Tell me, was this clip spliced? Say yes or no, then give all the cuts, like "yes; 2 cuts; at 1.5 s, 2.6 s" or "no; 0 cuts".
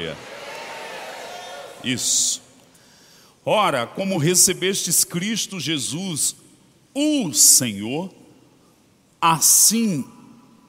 no; 0 cuts